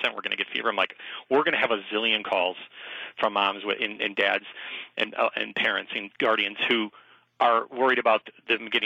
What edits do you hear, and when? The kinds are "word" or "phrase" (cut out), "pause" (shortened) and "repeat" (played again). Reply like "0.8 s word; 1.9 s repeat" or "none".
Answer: none

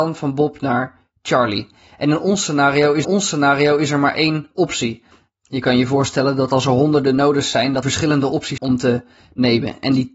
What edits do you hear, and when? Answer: 3.0 s repeat; 7.8 s word; 8.6 s phrase

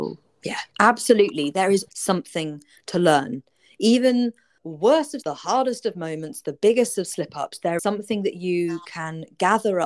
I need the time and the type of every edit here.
1.9 s word; 4.6 s word; 5.2 s word; 7.8 s word

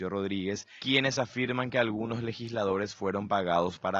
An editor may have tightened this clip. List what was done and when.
none

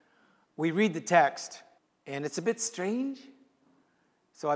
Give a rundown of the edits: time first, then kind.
1.8 s pause

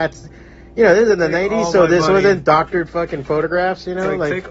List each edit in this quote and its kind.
none

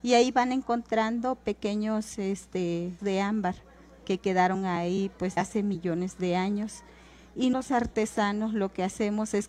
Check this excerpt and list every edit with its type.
3.0 s word; 5.4 s word; 7.5 s word

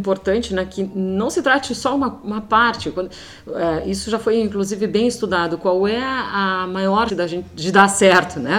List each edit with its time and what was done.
7.1 s word

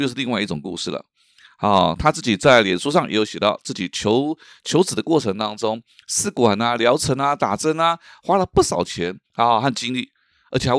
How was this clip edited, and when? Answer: 9.3 s pause

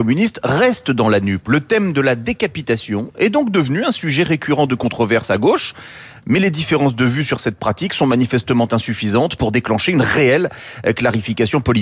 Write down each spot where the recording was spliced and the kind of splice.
none

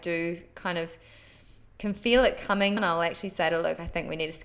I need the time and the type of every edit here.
2.8 s word

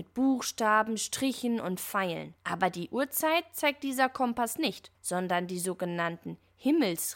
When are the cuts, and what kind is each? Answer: 2.4 s pause; 4.9 s pause

